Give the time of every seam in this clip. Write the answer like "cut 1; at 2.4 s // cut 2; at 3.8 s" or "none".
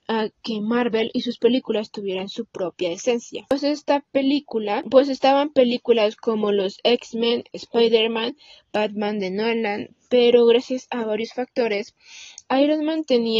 none